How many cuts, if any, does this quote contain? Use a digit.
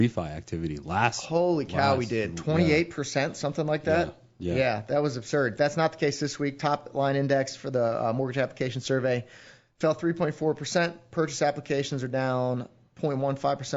0